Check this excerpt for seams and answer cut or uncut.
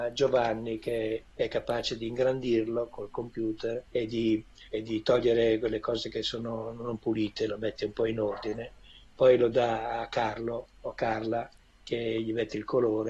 cut